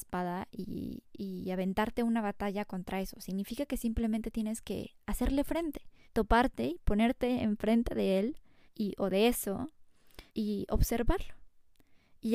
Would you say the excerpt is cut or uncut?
cut